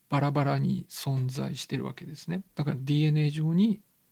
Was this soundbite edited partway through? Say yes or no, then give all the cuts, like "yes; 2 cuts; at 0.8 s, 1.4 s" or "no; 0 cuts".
yes; 1 cut; at 2.5 s